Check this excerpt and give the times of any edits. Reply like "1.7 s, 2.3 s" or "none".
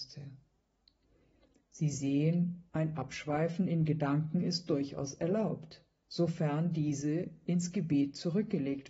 2.7 s

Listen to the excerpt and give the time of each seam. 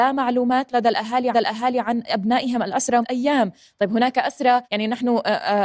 1.3 s, 3.0 s, 4.6 s

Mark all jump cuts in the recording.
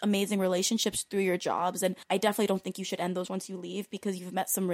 2.0 s, 3.3 s

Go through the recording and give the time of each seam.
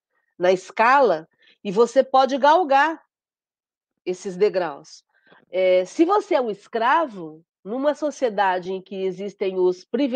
none

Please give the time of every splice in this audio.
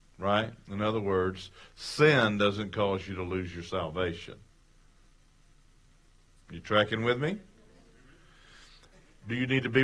none

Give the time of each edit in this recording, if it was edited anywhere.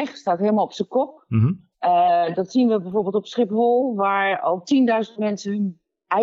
1.7 s

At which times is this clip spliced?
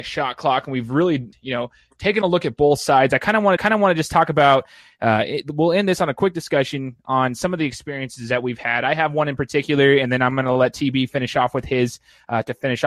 1.3 s, 3.6 s

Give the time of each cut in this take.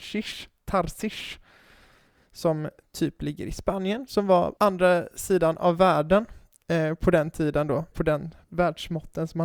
4.6 s, 7.9 s, 8.4 s

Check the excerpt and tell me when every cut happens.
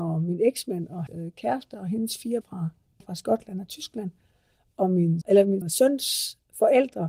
1.1 s, 2.4 s, 3.0 s, 5.2 s, 5.6 s

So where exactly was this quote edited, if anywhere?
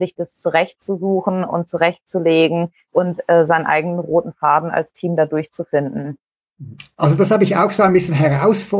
none

